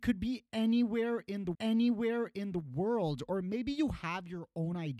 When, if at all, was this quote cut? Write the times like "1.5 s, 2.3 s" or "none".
1.5 s